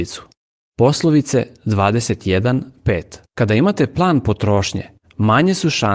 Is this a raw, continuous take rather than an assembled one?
no; 1 cut; at 3.3 s

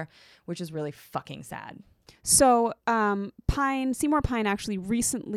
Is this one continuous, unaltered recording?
no; 1 cut; at 2.8 s

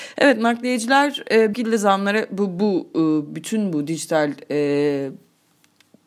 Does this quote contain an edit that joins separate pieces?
yes; 1 cut; at 1.5 s

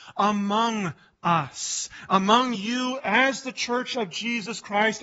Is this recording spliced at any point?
no; 0 cuts

